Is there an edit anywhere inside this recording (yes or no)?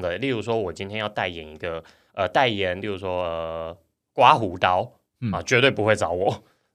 no